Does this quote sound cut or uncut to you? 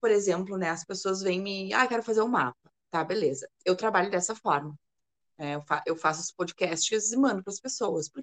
uncut